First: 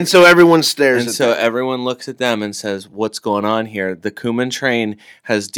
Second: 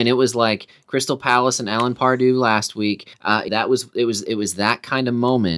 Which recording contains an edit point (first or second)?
second